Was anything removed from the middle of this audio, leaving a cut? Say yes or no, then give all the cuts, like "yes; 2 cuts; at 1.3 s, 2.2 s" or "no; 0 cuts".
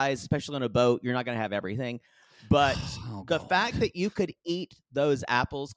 no; 0 cuts